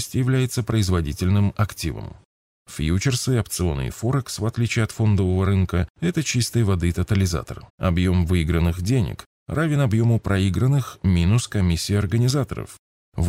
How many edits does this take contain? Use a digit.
1